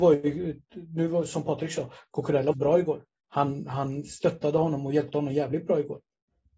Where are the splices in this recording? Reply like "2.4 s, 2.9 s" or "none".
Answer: 2.5 s, 3.2 s